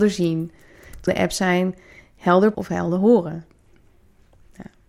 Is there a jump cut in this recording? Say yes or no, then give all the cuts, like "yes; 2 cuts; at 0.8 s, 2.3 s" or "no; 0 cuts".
yes; 2 cuts; at 1.1 s, 2.5 s